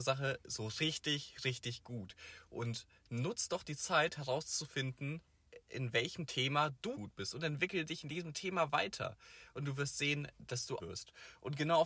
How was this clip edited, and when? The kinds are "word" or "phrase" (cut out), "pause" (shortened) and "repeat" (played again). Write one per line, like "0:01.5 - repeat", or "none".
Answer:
0:06.9 - word
0:10.8 - word